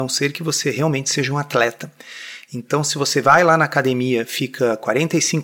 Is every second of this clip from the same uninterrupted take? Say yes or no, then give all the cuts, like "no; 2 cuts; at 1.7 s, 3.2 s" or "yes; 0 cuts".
yes; 0 cuts